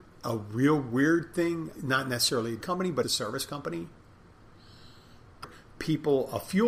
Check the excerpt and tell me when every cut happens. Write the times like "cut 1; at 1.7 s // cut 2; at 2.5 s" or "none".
cut 1; at 1.7 s // cut 2; at 2.6 s // cut 3; at 3.0 s // cut 4; at 5.4 s